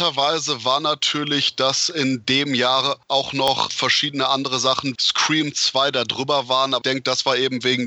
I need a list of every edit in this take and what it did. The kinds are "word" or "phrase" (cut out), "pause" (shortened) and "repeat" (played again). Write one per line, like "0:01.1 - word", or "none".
0:03.7 - word
0:04.9 - word
0:06.8 - word